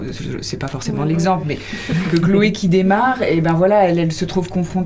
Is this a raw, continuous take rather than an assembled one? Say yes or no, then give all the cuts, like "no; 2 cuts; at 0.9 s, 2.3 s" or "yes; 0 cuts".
no; 1 cut; at 2.1 s